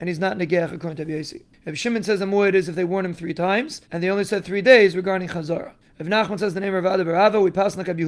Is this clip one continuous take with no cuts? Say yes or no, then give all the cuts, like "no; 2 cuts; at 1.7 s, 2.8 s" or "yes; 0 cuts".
no; 1 cut; at 3.8 s